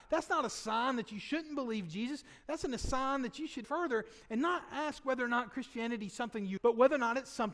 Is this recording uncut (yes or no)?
no